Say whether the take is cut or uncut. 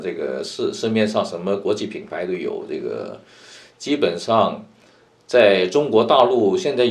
uncut